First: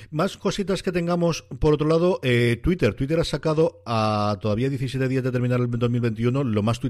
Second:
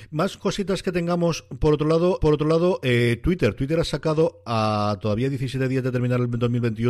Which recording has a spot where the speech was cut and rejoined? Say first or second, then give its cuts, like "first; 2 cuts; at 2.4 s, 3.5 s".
second; 1 cut; at 2.2 s